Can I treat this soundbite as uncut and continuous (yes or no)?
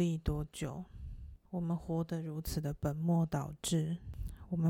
no